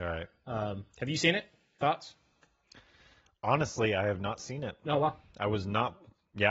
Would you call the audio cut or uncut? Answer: uncut